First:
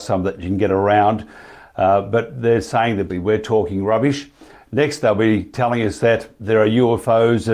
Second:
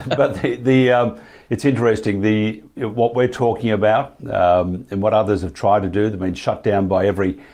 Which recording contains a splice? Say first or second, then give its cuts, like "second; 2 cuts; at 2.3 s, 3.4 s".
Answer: first; 1 cut; at 3.1 s